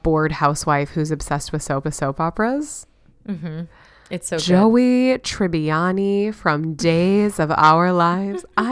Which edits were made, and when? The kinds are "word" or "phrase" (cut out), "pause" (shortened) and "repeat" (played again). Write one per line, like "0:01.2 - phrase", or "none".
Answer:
0:01.8 - repeat